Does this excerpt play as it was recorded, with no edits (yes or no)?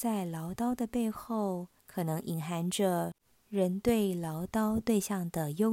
no